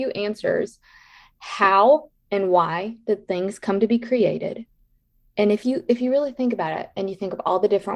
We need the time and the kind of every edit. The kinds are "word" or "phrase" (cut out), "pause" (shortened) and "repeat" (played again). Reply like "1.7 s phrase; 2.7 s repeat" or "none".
none